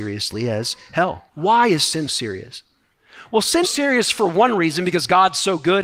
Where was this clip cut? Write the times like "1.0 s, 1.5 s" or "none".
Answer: 1.3 s, 2.1 s, 3.6 s